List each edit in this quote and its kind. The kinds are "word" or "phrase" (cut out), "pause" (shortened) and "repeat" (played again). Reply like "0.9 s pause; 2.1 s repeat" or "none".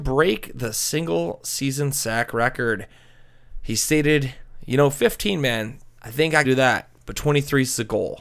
6.0 s pause; 6.4 s phrase